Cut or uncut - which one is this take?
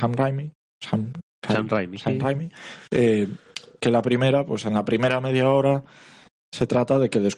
uncut